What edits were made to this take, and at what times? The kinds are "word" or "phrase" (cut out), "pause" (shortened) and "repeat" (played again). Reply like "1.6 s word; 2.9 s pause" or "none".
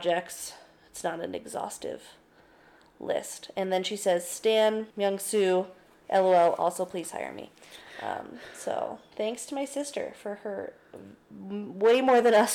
4.9 s pause